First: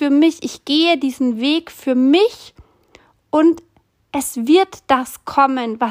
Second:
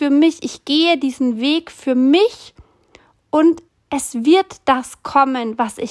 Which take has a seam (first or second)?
second